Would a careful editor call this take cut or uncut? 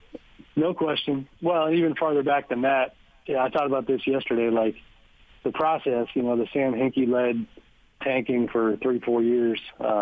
uncut